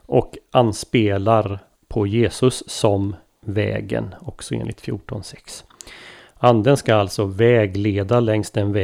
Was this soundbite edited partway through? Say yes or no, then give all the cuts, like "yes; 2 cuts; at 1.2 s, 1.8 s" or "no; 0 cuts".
no; 0 cuts